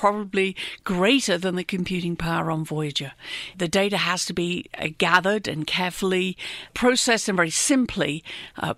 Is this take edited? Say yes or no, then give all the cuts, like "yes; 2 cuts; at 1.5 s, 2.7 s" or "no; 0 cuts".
no; 0 cuts